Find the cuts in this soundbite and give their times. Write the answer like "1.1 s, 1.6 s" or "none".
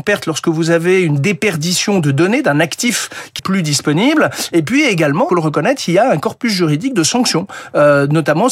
3.4 s, 5.3 s